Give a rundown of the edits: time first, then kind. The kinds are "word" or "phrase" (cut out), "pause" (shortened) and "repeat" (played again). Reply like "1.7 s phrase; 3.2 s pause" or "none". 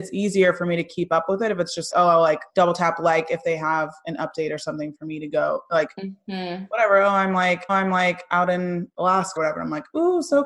1.9 s word; 2.5 s pause; 7.7 s repeat; 9.4 s word